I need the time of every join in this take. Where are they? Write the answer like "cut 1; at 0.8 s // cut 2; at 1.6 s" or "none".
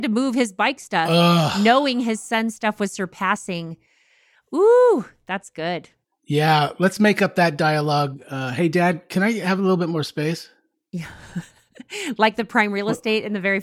none